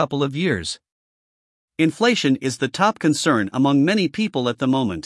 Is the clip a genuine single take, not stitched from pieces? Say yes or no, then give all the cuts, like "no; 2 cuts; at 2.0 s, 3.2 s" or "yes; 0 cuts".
yes; 0 cuts